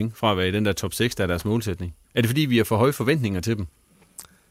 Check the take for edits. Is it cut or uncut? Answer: cut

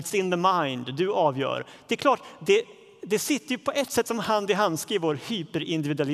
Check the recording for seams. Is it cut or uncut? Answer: uncut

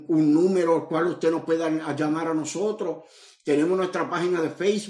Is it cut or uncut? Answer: uncut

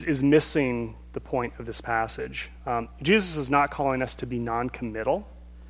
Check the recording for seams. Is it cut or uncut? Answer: uncut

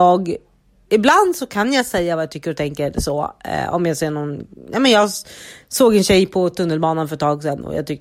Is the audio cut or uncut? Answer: uncut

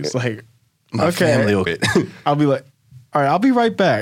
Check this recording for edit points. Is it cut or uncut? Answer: cut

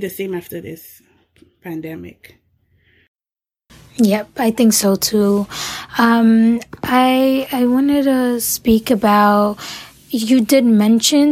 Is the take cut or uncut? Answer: uncut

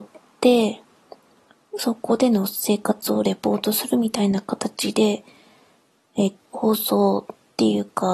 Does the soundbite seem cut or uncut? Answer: cut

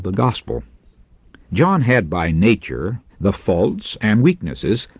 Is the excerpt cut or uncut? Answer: cut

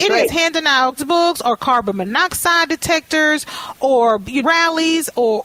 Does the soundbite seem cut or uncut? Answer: cut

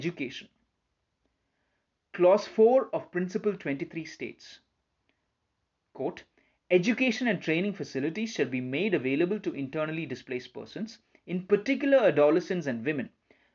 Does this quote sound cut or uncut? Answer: uncut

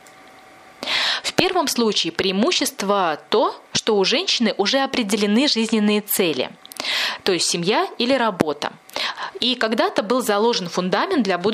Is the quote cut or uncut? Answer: uncut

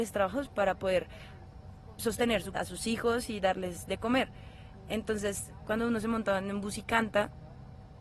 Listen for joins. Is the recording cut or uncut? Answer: cut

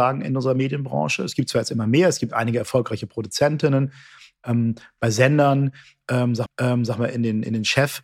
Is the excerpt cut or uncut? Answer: cut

